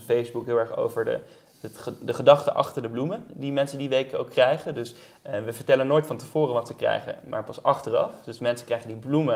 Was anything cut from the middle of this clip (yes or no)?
no